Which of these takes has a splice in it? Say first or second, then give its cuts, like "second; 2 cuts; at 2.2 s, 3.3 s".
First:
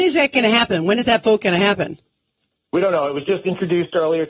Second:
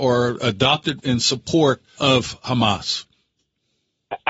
second; 2 cuts; at 1.0 s, 2.0 s